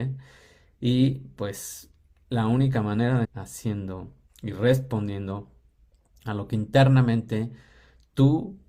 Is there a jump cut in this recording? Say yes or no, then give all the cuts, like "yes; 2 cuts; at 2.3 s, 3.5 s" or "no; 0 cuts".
yes; 1 cut; at 3.2 s